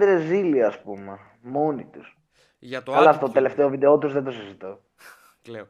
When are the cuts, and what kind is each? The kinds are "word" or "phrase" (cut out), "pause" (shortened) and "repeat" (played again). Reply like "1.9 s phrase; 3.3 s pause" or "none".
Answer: none